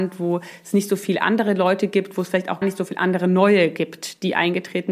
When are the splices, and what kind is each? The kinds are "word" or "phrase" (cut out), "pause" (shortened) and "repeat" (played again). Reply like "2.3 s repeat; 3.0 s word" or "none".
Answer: 2.6 s word